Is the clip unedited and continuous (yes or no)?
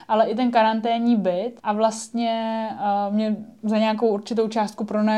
no